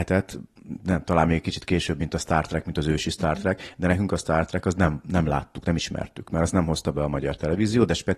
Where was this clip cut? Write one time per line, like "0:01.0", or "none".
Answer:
none